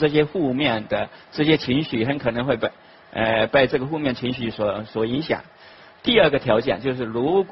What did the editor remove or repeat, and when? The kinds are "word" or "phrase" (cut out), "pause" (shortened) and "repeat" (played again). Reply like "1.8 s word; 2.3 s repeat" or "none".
none

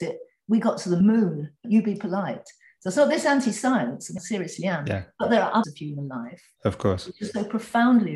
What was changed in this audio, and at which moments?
1.6 s word; 4.2 s word; 5.6 s word

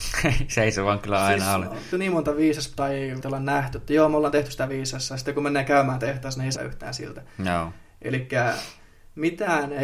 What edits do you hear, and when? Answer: 1.9 s phrase; 3.2 s word; 6.6 s word

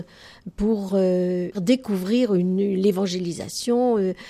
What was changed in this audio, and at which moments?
1.5 s word

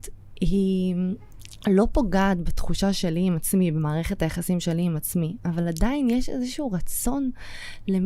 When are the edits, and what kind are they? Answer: none

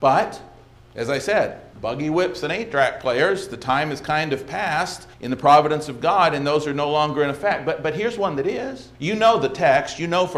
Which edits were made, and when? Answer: 1.7 s pause; 5.1 s pause; 8.9 s pause

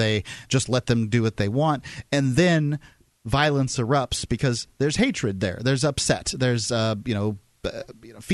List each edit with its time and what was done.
none

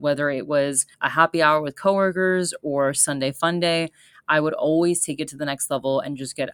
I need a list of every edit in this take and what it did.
0.9 s pause

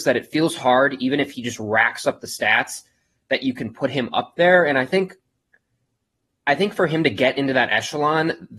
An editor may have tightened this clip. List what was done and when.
none

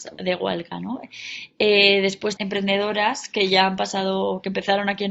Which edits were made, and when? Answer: 2.4 s word

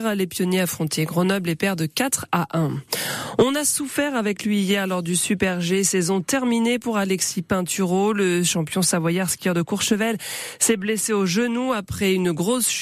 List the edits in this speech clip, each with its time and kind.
none

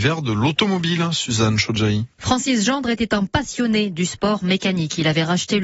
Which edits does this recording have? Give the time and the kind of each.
2.1 s pause

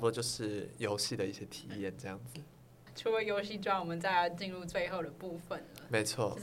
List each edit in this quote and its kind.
none

